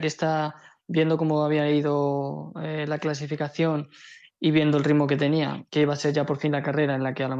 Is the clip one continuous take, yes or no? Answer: yes